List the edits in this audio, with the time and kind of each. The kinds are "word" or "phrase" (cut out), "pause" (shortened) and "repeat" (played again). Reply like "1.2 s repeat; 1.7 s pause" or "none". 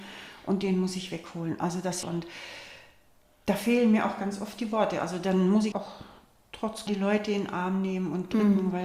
2.0 s phrase; 5.7 s word; 6.9 s word